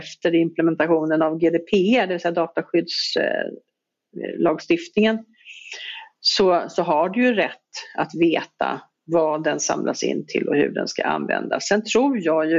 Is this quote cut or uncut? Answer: uncut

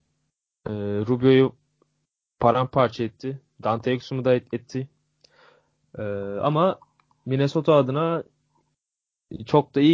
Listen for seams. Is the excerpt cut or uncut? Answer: uncut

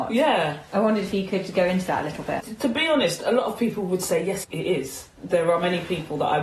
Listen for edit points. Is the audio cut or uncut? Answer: cut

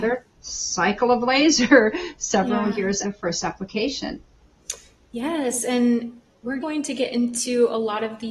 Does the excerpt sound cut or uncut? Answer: cut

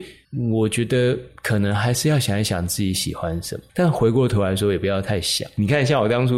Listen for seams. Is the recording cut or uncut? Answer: cut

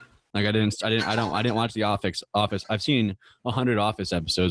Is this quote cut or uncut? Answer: uncut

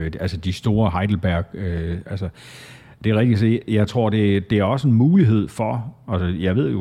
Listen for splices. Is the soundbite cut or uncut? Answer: uncut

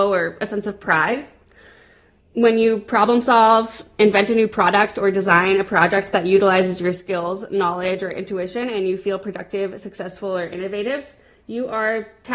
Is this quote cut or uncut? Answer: uncut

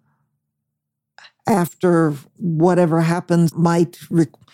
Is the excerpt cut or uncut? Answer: cut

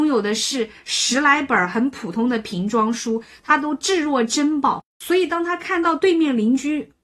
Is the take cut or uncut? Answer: uncut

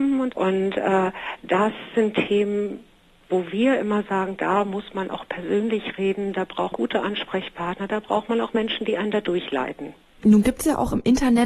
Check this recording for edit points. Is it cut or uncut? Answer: cut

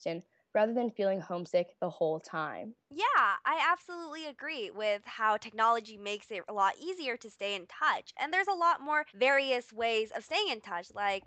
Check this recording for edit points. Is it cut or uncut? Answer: cut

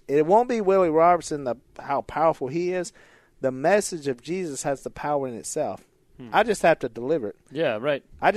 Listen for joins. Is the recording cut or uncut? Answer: uncut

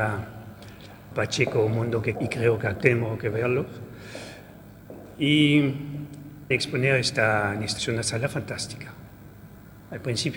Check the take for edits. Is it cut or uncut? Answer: cut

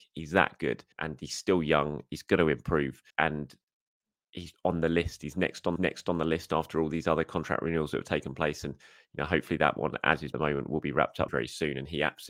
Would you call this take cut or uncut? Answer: cut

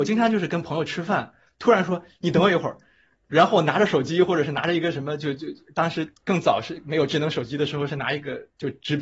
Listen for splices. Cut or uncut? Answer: uncut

